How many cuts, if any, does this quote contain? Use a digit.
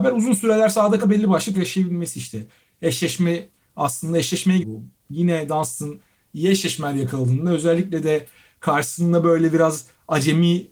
3